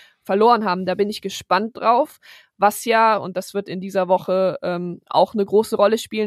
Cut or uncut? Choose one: uncut